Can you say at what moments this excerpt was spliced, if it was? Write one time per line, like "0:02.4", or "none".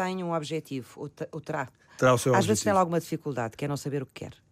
none